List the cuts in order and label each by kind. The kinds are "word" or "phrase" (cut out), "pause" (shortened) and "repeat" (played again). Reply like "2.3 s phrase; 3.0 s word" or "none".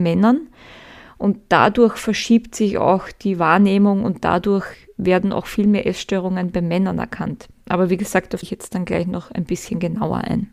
8.4 s phrase

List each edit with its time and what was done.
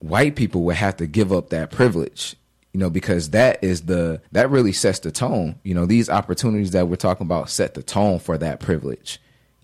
4.2 s pause

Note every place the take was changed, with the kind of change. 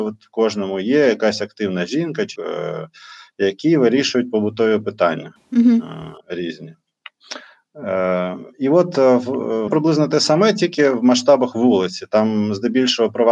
2.4 s word; 6.2 s pause; 9.7 s word

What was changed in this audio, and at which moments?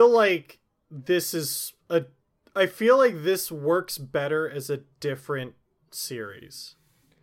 none

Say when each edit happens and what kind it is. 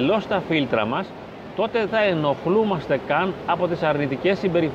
1.9 s word

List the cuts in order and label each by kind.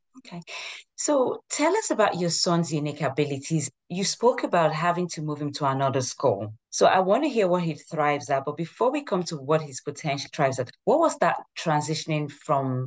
3.8 s word; 6.6 s pause; 10.3 s phrase; 10.8 s pause

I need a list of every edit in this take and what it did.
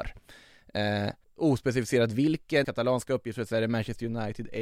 1.2 s pause; 2.6 s word

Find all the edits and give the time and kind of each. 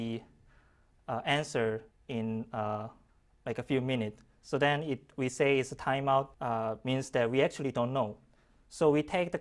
1.9 s pause; 3.1 s pause; 6.3 s pause

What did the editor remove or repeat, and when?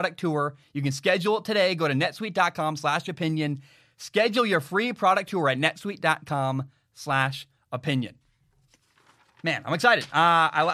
none

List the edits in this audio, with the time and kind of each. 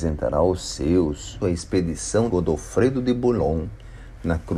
1.4 s word; 2.3 s word

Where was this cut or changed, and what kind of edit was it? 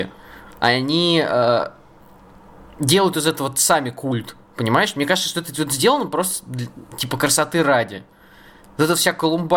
none

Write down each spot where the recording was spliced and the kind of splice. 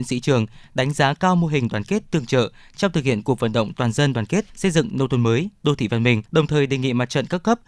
4.5 s pause; 6.3 s pause

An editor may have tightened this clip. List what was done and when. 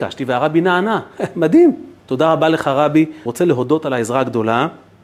2.0 s pause; 3.3 s phrase

